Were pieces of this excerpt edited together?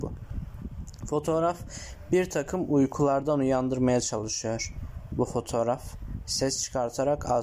no; 0 cuts

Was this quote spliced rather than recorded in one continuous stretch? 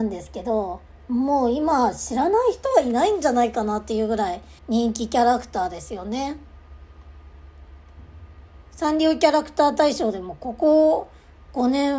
yes; 1 cut; at 4.6 s

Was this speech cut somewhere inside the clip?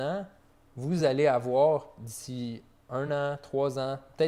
no; 0 cuts

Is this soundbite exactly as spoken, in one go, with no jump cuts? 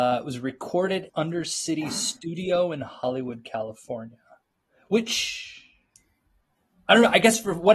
no; 1 cut; at 1.1 s

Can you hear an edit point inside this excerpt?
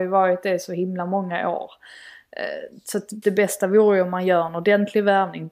yes; 1 cut; at 3.2 s

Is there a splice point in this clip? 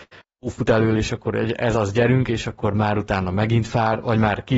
no; 0 cuts

